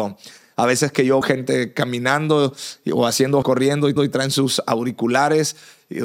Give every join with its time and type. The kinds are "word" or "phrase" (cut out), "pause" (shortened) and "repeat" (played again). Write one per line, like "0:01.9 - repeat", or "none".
0:01.2 - word
0:03.4 - word
0:04.0 - repeat